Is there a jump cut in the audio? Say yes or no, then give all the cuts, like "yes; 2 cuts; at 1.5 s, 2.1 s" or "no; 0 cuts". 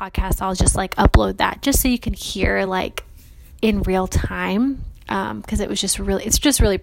no; 0 cuts